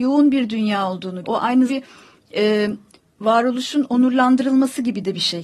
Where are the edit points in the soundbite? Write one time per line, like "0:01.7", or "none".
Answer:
0:01.2
0:01.7
0:02.9